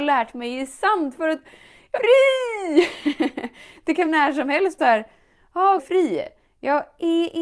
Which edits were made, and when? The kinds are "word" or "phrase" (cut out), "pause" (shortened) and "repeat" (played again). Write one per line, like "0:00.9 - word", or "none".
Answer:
0:01.9 - word
0:04.1 - word
0:04.8 - word
0:05.8 - phrase